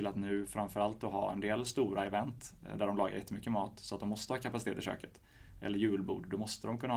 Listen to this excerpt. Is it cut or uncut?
uncut